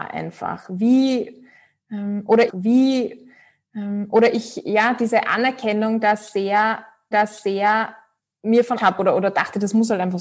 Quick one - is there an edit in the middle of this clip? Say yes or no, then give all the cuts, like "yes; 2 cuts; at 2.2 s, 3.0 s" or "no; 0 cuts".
yes; 3 cuts; at 2.5 s, 7.1 s, 8.8 s